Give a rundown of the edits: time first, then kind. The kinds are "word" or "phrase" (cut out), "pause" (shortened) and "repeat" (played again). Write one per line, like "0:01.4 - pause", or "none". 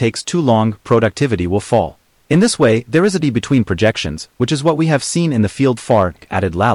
0:02.1 - pause
0:03.2 - word
0:05.8 - word